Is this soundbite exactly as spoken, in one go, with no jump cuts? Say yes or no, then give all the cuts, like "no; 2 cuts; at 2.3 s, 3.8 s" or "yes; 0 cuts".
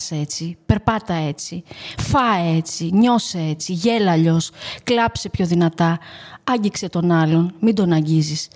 yes; 0 cuts